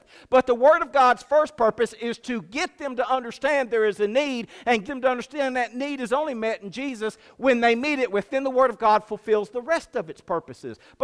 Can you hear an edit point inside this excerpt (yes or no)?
yes